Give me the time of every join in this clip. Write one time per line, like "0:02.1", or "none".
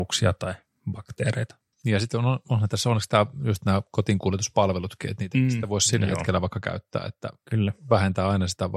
0:01.7

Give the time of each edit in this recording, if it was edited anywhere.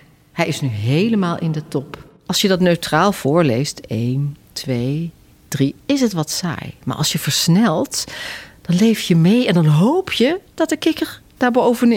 0:02.2
0:04.4
0:05.8

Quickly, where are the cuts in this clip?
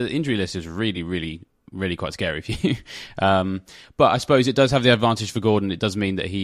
none

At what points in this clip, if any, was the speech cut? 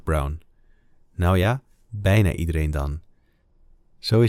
none

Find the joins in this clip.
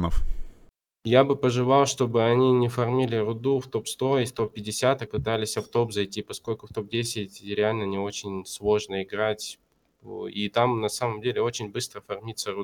0:05.1

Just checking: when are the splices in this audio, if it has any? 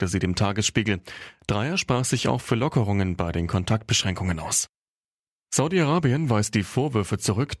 none

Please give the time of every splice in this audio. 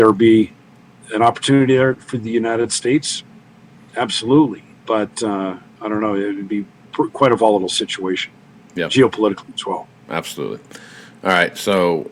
0:04.7

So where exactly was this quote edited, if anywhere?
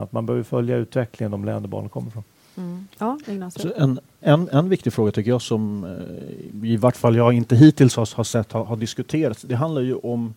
0:02.9

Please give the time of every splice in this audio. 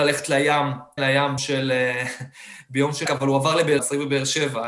0:01.0
0:01.4
0:03.1
0:03.8

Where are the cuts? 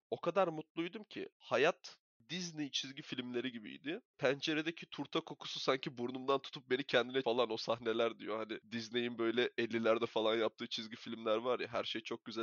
0:07.2

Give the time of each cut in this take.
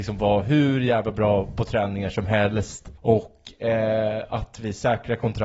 0:03.0

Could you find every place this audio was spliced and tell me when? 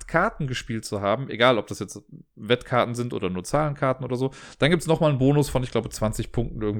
none

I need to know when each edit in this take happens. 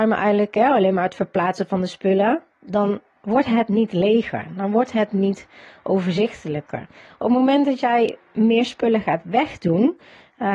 none

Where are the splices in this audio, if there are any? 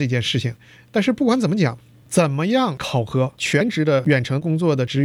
none

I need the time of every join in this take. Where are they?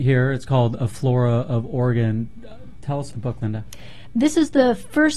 0:03.1

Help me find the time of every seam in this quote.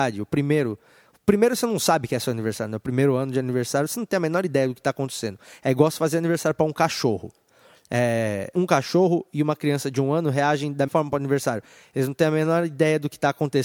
0:08.5
0:10.9

